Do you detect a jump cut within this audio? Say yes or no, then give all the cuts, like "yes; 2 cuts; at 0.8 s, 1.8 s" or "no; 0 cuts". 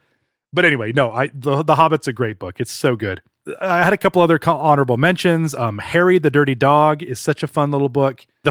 no; 0 cuts